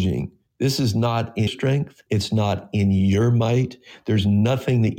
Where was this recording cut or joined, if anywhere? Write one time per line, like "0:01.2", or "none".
0:01.5
0:02.1